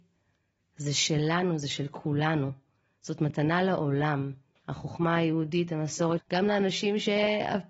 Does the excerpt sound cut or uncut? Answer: cut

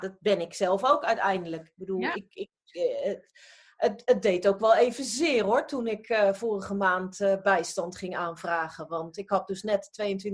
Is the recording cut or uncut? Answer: uncut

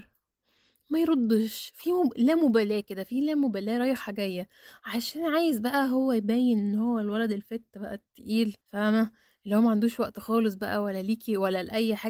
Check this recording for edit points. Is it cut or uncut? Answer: cut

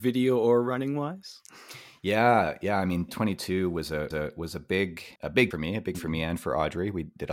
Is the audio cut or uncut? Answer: cut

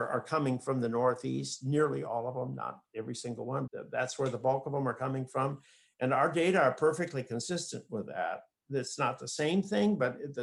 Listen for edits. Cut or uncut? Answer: cut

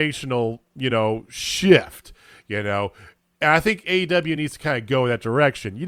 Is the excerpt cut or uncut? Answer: uncut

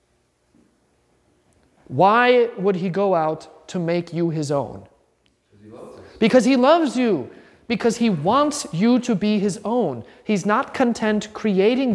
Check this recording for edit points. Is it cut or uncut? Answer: uncut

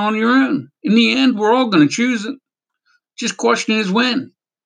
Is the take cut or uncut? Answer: uncut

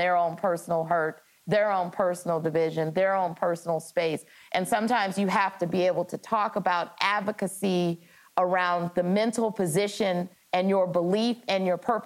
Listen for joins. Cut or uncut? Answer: uncut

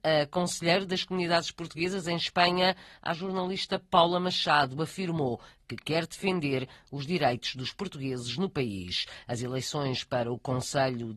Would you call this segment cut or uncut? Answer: uncut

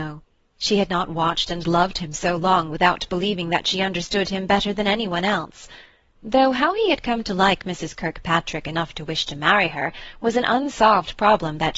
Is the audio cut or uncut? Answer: uncut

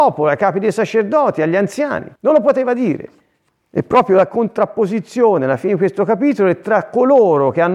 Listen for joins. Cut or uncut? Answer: cut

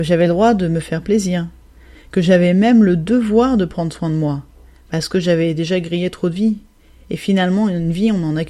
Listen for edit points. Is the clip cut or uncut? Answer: uncut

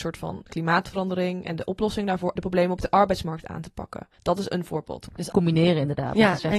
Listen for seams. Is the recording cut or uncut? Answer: cut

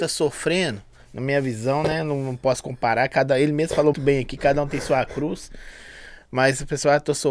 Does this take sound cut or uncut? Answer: cut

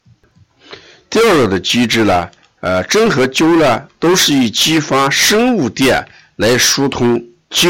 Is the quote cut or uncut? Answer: uncut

